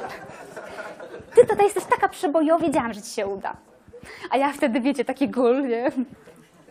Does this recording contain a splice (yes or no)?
yes